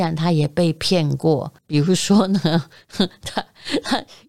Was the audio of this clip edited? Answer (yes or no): yes